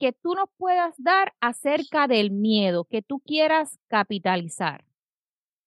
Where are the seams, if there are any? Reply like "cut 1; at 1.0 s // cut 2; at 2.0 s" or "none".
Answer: none